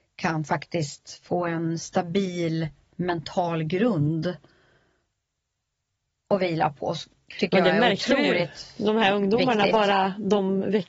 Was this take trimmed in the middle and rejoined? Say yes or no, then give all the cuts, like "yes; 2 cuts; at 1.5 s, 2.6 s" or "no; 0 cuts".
no; 0 cuts